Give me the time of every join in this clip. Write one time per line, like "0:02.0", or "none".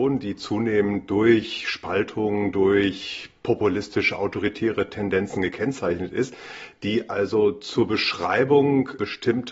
none